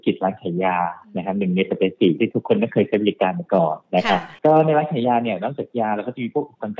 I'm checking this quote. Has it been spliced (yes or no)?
yes